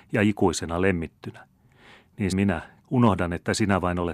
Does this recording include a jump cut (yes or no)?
yes